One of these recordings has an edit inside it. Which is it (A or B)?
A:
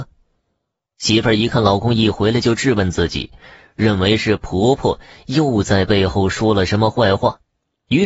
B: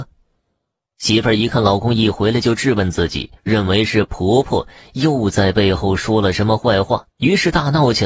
B